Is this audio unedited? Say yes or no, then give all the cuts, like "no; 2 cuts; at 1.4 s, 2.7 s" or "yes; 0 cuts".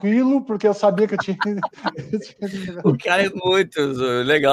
yes; 0 cuts